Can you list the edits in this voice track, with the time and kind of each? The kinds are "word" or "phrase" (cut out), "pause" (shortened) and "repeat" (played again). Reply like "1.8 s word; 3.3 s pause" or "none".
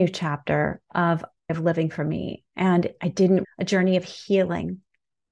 1.5 s phrase; 3.4 s word

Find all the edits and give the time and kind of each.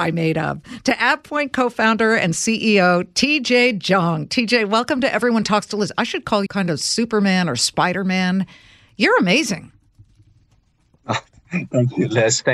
6.5 s word

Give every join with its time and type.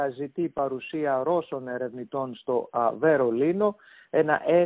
none

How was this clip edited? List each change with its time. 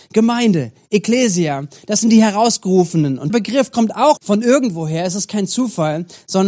3.3 s word; 4.2 s word

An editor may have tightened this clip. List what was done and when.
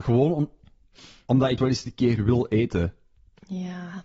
1.6 s word

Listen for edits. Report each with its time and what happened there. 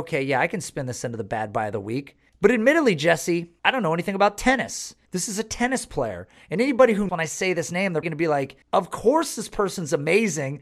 2.3 s pause; 3.6 s pause; 5.1 s pause; 7.1 s phrase; 8.0 s word; 8.6 s pause

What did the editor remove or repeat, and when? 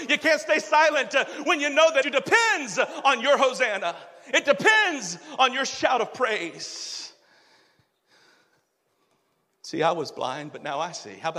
2.0 s phrase

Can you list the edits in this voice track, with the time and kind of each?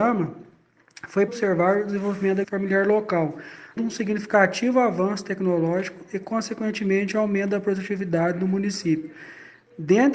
1.3 s word; 2.4 s word; 3.8 s word

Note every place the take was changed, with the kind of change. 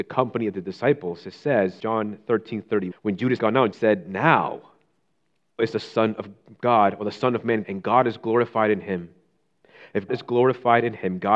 1.8 s word; 2.9 s word; 3.4 s word; 3.7 s word; 5.6 s word; 7.6 s word; 10.1 s word

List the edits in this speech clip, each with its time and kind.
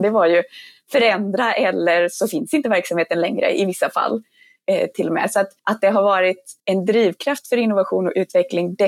5.6 s pause; 6.6 s pause

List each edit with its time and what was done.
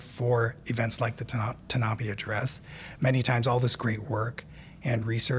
none

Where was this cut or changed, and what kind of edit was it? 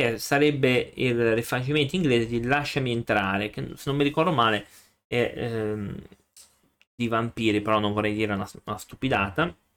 none

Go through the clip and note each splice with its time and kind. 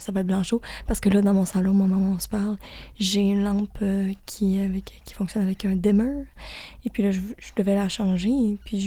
none

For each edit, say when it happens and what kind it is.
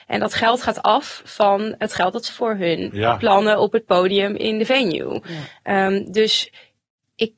2.3 s word

